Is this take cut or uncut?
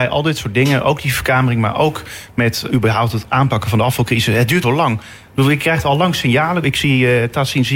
cut